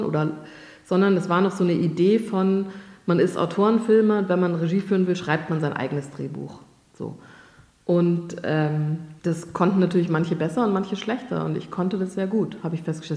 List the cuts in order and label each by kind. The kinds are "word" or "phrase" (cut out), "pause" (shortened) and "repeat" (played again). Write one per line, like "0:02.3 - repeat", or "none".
0:09.2 - pause